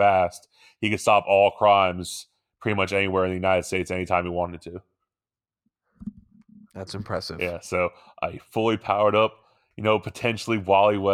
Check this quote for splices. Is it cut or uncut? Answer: uncut